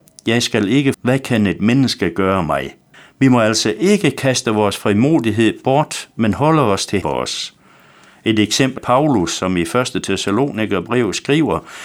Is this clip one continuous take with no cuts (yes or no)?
no